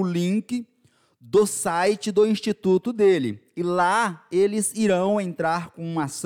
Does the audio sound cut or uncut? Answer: uncut